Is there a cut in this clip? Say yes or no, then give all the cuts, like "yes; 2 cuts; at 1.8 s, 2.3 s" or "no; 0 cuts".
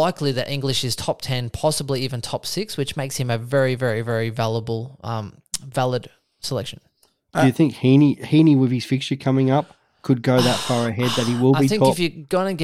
no; 0 cuts